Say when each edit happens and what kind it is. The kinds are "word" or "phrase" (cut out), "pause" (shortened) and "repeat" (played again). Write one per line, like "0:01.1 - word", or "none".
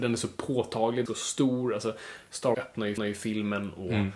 0:01.1 - phrase
0:02.5 - word
0:03.0 - repeat